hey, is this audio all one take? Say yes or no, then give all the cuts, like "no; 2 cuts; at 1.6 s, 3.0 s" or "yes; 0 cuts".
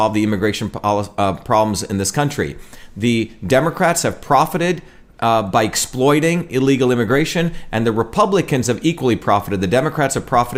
yes; 0 cuts